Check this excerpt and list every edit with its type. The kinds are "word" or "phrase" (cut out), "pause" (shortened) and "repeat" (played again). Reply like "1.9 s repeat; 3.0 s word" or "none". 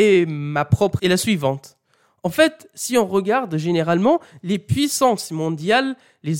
1.0 s word